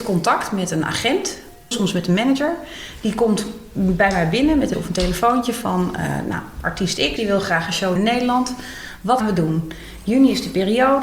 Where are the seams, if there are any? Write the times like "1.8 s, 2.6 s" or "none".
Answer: 1.7 s, 4.7 s, 7.2 s, 8.0 s, 9.2 s